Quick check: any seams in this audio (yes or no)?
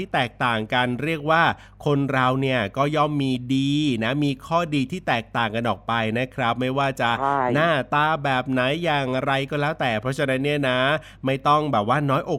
no